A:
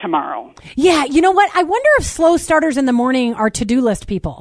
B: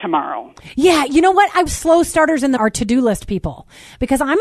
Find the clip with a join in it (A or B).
B